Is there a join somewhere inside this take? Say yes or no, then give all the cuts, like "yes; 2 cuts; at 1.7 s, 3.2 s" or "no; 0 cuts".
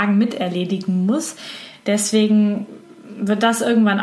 no; 0 cuts